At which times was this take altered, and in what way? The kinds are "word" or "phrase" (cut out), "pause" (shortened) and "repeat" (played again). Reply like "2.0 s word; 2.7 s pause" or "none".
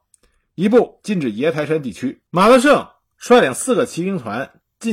2.3 s pause